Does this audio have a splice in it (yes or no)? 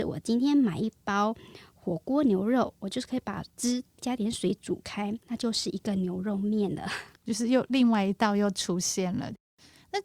yes